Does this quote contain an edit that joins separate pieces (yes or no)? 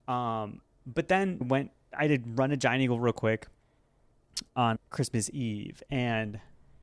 yes